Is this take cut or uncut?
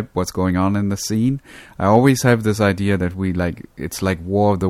uncut